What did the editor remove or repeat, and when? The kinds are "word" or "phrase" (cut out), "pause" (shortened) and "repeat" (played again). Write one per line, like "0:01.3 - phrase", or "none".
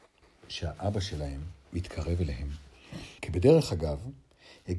0:03.2 - pause